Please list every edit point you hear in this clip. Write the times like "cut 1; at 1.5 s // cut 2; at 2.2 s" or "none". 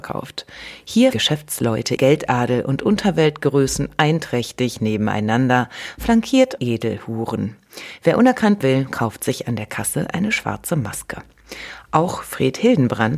cut 1; at 1.1 s // cut 2; at 2.0 s // cut 3; at 6.6 s // cut 4; at 8.6 s